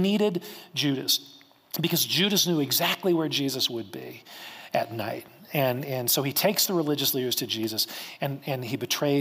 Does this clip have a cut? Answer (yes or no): no